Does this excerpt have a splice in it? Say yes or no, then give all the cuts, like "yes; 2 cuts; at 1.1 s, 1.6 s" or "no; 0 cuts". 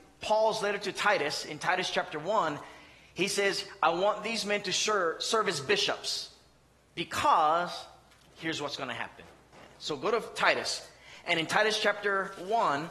no; 0 cuts